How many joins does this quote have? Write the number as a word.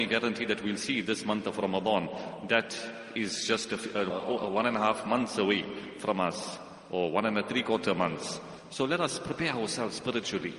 one